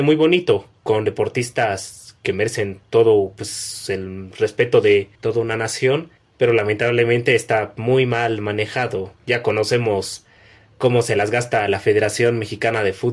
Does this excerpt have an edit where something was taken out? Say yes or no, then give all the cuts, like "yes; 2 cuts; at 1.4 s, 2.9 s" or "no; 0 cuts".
yes; 2 cuts; at 5.1 s, 6.2 s